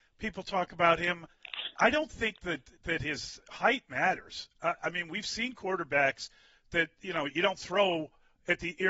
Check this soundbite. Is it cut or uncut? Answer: uncut